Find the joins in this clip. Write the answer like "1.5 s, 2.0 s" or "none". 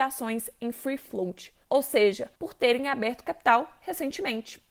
1.6 s, 2.4 s